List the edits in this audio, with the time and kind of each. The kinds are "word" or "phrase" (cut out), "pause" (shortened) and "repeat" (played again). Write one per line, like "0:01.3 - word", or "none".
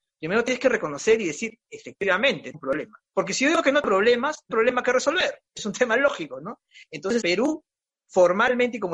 0:02.5 - word
0:03.1 - pause
0:03.8 - word
0:04.5 - word
0:05.5 - pause
0:07.2 - word